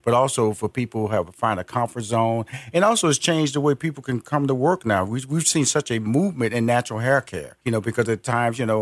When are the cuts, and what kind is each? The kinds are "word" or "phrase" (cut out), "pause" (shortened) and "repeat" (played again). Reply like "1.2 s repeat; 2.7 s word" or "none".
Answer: 7.6 s pause